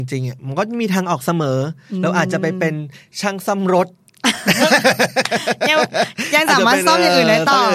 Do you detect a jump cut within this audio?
no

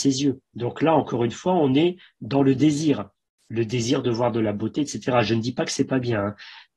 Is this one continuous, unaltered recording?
yes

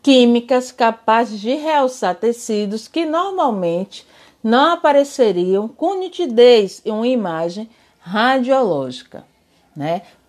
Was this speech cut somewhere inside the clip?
no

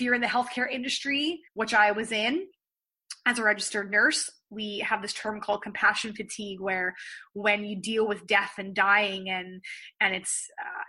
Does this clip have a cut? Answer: yes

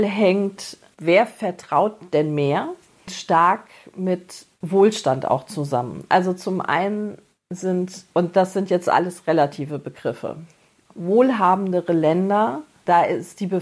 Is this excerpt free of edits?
yes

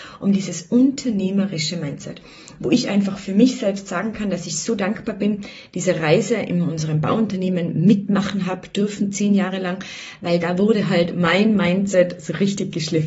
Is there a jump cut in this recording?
no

